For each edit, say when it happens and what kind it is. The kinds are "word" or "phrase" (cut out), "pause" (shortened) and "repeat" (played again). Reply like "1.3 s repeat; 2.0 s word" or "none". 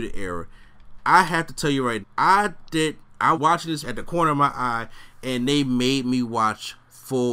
2.0 s word; 3.3 s word; 3.8 s word